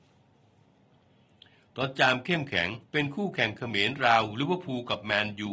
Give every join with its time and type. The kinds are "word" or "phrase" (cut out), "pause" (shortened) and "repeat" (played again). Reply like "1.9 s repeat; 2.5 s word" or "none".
2.8 s pause